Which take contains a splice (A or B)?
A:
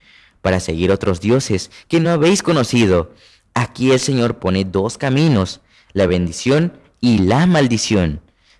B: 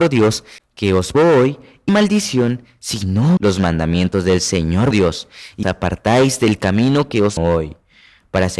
B